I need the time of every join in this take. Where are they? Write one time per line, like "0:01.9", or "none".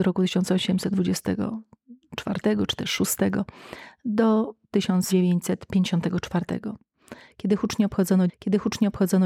0:08.3